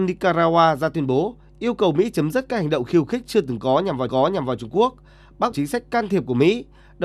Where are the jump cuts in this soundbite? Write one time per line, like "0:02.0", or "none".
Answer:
0:04.1
0:05.5